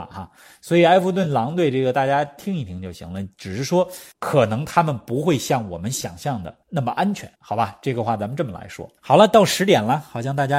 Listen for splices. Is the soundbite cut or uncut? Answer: cut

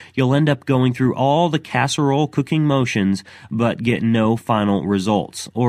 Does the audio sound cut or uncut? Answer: uncut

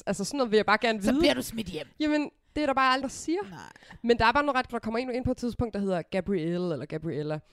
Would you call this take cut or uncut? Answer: cut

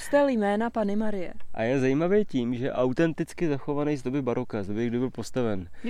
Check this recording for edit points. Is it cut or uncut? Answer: uncut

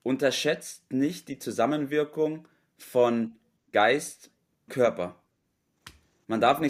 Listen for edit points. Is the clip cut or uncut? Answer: cut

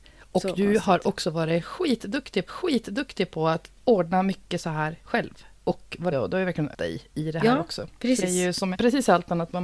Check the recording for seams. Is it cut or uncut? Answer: cut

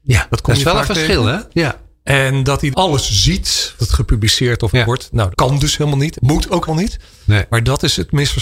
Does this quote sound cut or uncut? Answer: cut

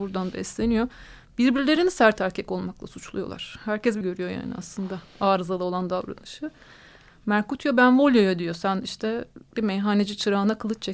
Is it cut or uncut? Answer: cut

